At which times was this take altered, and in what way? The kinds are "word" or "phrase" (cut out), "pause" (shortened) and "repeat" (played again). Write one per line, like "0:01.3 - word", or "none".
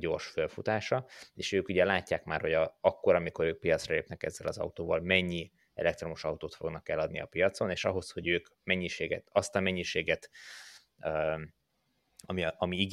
none

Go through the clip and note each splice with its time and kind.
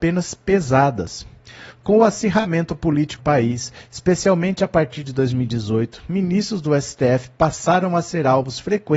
0:03.2 - word

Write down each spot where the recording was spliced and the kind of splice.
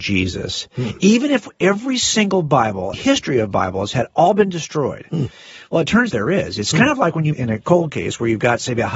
0:02.9 - phrase
0:06.1 - word
0:07.3 - phrase

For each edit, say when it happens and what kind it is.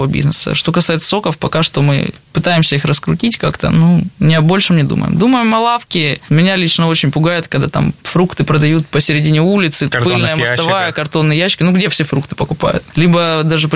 0:02.2 - pause
0:04.1 - pause
0:09.9 - word

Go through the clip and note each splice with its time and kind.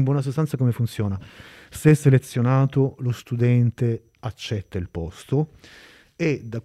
none

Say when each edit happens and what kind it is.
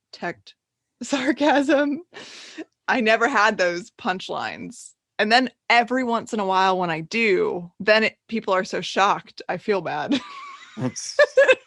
0:07.7 - pause

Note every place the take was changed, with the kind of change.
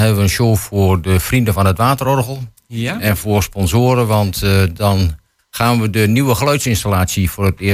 none

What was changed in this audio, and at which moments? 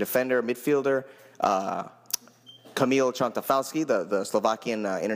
none

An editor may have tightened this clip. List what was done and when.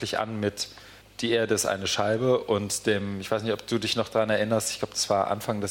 0:01.0 - pause

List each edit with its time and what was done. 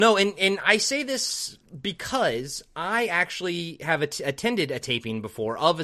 none

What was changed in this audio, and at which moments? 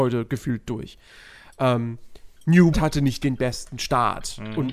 0:02.7 - word

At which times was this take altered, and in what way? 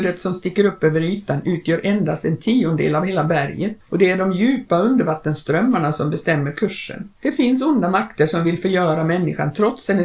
0:03.8 - pause
0:07.2 - pause

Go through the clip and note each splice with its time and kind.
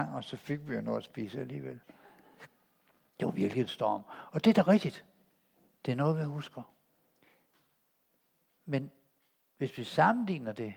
none

